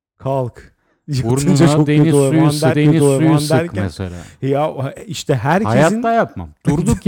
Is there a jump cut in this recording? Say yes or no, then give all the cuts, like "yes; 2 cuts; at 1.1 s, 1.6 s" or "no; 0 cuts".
yes; 1 cut; at 2.7 s